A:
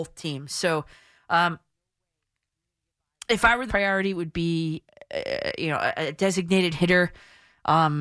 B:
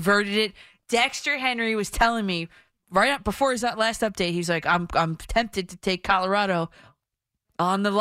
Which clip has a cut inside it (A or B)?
A